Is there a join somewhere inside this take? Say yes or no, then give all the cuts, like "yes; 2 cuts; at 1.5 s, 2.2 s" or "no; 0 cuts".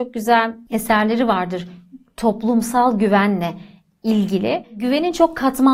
no; 0 cuts